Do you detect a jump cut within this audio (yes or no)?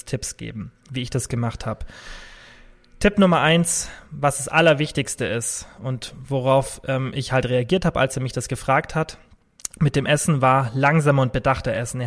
no